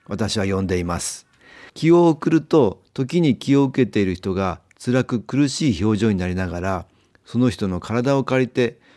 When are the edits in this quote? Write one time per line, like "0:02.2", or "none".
0:01.7